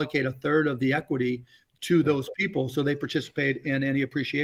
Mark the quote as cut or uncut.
uncut